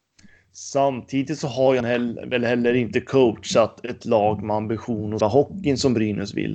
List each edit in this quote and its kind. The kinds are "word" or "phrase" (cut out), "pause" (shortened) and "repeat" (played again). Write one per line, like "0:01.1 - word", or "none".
0:01.8 - word
0:05.2 - phrase